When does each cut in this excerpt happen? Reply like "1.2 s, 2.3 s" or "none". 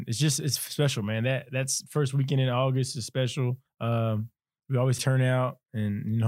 3.7 s, 5.0 s